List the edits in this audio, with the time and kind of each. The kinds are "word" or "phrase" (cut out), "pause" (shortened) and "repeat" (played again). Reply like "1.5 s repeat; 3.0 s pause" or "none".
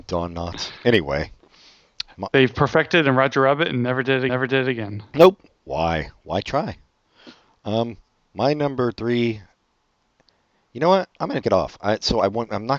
4.3 s repeat; 5.5 s pause; 11.1 s pause; 11.4 s word